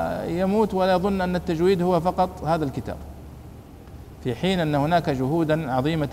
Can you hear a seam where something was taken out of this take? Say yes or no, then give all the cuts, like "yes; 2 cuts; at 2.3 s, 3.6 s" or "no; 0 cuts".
no; 0 cuts